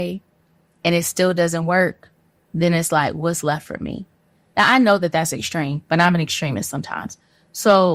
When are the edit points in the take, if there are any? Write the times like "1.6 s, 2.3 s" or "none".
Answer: none